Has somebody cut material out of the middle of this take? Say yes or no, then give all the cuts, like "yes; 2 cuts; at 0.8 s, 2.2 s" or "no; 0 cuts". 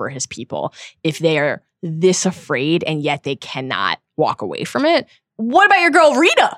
no; 0 cuts